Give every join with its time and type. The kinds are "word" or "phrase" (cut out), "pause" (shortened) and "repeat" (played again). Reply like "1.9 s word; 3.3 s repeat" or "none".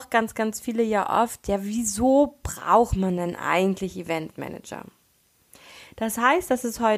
none